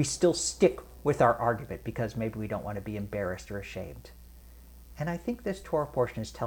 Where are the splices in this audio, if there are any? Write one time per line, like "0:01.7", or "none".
none